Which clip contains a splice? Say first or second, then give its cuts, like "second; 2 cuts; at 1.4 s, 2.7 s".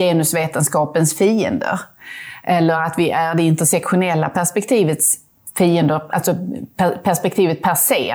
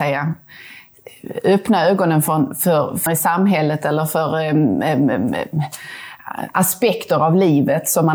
second; 1 cut; at 3.1 s